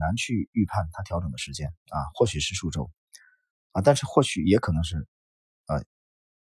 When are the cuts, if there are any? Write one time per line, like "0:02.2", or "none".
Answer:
0:01.8
0:05.2